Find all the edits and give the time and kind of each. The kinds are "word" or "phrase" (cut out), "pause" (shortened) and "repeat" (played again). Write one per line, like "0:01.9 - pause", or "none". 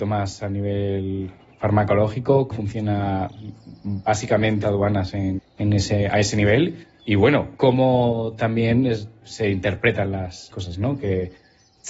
0:02.5 - word
0:04.6 - word
0:05.4 - word
0:07.6 - word
0:09.2 - word
0:10.5 - word